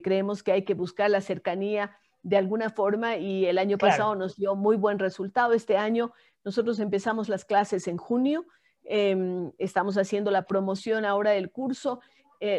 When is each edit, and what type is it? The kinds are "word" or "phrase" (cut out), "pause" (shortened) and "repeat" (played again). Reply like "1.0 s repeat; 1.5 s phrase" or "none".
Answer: none